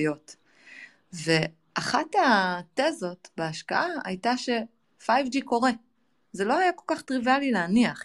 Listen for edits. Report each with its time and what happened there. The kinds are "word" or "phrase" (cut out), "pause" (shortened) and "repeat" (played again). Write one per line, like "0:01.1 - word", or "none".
none